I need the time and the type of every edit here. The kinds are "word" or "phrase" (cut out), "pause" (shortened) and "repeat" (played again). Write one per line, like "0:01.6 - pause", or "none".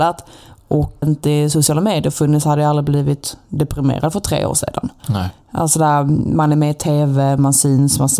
0:01.0 - word